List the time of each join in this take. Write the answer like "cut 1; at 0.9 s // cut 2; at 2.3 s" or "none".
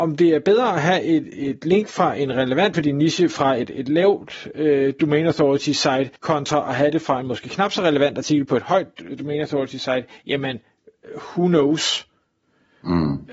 cut 1; at 2.7 s // cut 2; at 6.2 s